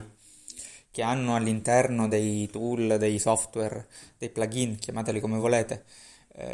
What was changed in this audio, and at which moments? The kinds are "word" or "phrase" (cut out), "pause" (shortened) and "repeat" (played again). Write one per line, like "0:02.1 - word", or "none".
none

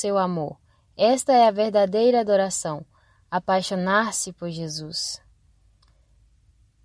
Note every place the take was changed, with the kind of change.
none

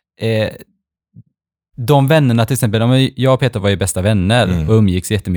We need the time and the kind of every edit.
none

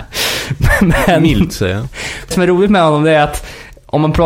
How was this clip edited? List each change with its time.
0:02.3 - word

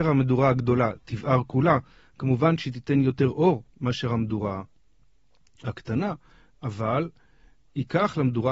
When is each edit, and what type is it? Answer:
none

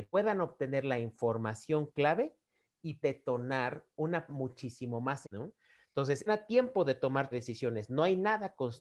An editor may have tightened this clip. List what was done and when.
0:03.0 - word
0:04.3 - word
0:05.2 - word
0:06.3 - word
0:07.3 - word

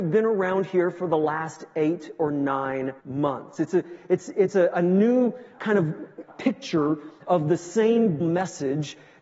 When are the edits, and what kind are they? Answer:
0:03.0 - pause
0:05.6 - word
0:06.3 - word
0:08.2 - word

